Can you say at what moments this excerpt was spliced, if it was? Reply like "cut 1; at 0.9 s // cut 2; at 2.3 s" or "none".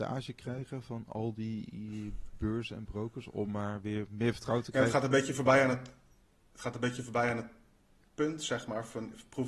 none